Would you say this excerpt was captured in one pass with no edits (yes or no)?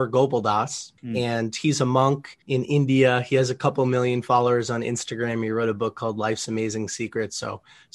no